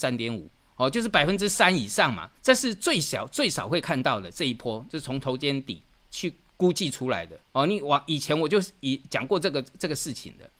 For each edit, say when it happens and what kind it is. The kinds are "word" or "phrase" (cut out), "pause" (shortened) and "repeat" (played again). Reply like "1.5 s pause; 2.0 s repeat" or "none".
2.4 s pause; 6.0 s word; 7.4 s pause